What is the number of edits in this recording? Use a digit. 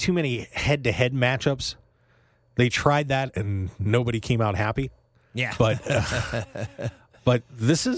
0